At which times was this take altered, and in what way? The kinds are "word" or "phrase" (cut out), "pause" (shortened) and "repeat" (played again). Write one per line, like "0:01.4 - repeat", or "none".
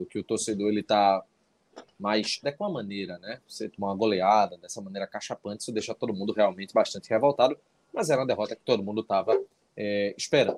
0:02.4 - word